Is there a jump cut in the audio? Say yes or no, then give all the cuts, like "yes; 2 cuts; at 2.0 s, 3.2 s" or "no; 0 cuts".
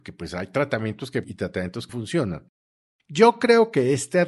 yes; 2 cuts; at 1.2 s, 1.9 s